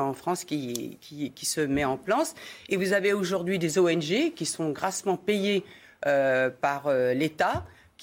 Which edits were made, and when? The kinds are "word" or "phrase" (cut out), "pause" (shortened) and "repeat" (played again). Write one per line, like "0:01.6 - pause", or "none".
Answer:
none

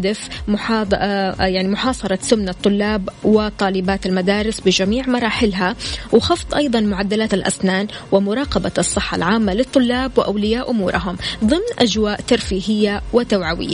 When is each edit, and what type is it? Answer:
0:07.3 - word

